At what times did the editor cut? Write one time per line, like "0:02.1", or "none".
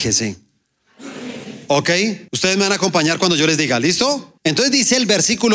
0:02.3
0:04.4